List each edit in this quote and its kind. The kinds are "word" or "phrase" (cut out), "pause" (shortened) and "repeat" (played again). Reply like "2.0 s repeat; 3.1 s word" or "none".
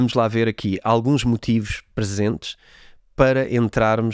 none